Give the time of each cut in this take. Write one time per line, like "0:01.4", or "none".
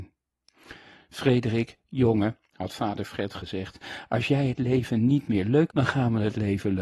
0:05.7